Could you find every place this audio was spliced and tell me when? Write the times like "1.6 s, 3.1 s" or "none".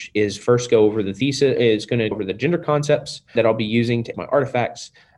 1.6 s, 2.1 s, 3.4 s, 4.1 s